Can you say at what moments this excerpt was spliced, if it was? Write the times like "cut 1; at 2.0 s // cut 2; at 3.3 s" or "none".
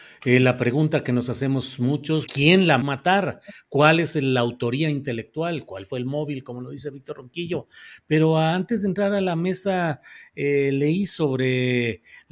cut 1; at 2.3 s // cut 2; at 2.8 s